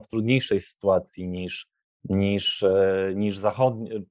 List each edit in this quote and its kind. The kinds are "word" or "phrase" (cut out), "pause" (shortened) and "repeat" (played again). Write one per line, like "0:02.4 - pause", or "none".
0:01.8 - pause